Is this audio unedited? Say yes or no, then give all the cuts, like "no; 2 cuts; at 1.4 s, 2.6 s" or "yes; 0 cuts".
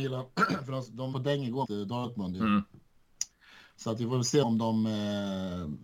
no; 3 cuts; at 1.1 s, 1.6 s, 4.4 s